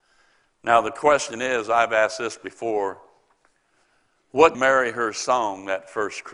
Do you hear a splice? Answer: yes; 1 cut; at 4.5 s

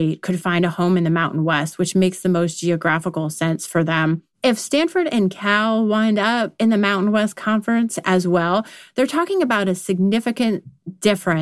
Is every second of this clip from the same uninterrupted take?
no; 1 cut; at 4.3 s

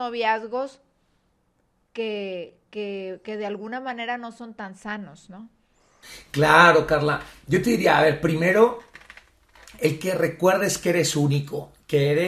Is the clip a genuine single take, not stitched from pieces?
yes; 0 cuts

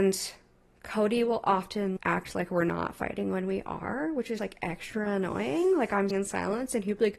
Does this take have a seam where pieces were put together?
yes; 3 cuts; at 2.0 s, 4.4 s, 6.1 s

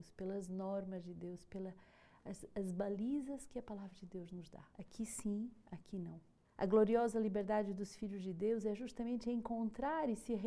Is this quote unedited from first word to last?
yes; 0 cuts

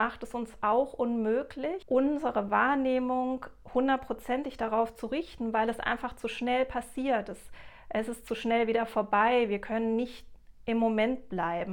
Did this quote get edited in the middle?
no; 0 cuts

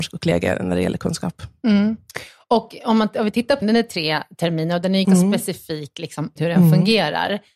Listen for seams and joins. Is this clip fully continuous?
no; 3 cuts; at 3.6 s, 5.0 s, 6.4 s

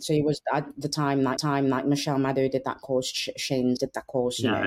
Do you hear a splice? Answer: yes; 2 cuts; at 1.4 s, 3.8 s

